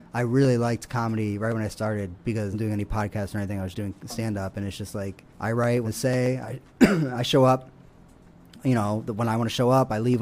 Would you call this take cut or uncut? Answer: cut